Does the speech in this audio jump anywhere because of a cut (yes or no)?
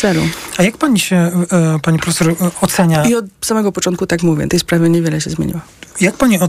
yes